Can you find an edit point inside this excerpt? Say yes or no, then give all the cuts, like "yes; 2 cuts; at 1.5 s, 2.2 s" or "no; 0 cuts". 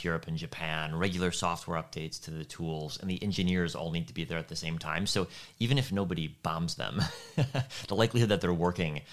no; 0 cuts